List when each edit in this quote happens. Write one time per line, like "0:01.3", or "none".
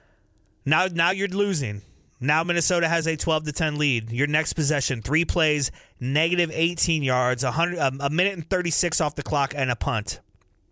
none